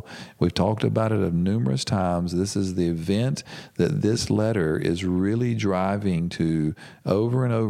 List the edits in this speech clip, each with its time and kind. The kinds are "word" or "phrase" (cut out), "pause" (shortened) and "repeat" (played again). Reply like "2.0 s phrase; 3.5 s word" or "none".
none